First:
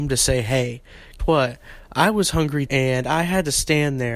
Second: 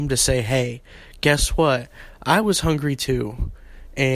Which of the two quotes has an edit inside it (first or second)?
first